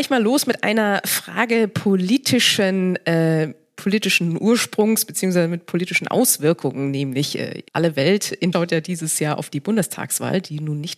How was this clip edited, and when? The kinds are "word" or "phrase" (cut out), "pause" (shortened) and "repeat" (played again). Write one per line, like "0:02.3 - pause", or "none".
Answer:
0:07.7 - pause
0:08.5 - phrase